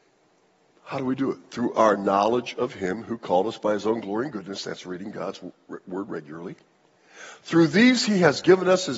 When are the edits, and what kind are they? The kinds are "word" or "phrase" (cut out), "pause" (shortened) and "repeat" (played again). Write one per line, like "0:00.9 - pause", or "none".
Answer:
none